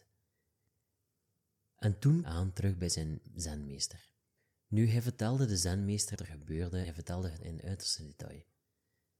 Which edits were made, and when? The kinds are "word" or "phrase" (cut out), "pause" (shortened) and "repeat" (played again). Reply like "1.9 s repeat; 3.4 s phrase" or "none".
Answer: 2.2 s phrase; 6.2 s word; 6.8 s word; 7.4 s word